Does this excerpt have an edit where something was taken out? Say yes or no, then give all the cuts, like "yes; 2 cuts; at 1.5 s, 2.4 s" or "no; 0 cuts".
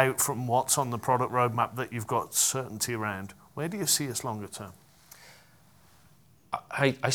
no; 0 cuts